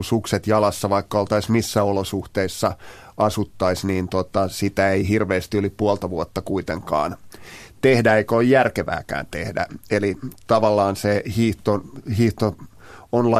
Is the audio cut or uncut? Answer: uncut